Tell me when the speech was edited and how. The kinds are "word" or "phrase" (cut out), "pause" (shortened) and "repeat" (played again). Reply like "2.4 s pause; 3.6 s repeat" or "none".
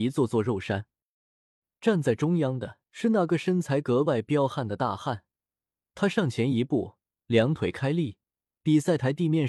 2.8 s pause